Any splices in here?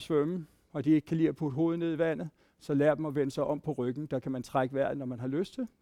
no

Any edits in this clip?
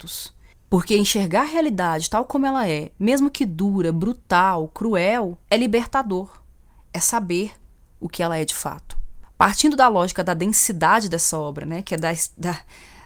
yes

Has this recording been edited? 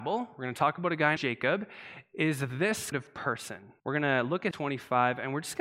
yes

